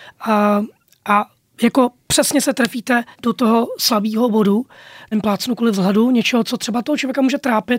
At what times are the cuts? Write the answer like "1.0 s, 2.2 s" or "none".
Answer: 3.1 s, 5.1 s